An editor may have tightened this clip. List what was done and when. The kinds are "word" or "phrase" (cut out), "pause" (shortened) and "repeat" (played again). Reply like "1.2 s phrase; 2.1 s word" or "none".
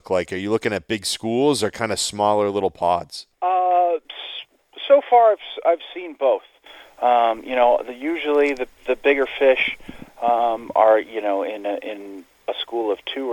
3.3 s pause; 12.4 s pause